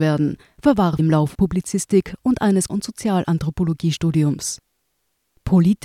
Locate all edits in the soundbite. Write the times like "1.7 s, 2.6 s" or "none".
1.0 s, 1.3 s, 2.7 s

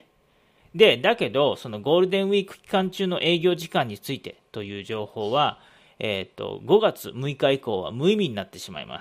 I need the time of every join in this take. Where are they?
none

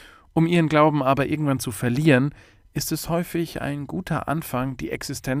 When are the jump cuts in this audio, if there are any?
none

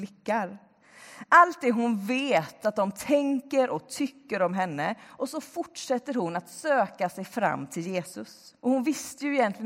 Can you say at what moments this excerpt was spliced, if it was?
8.6 s

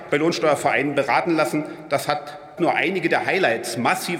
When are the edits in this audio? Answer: 2.6 s

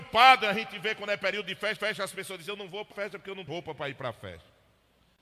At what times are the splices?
1.8 s, 2.9 s, 3.5 s

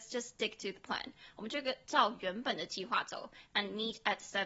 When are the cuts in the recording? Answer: none

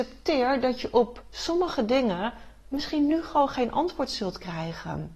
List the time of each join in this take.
none

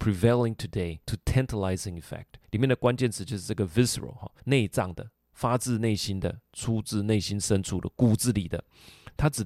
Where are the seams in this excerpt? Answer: 1.0 s, 2.4 s, 4.4 s

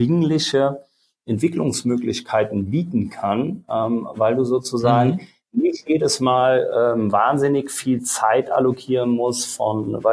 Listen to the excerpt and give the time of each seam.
none

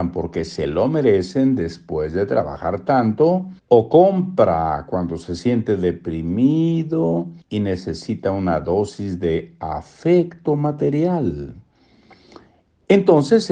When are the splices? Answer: 3.6 s, 7.4 s

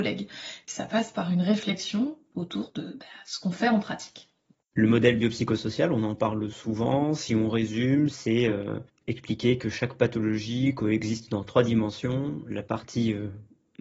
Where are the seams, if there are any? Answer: none

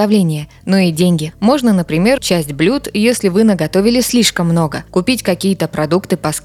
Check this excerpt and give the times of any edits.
2.2 s

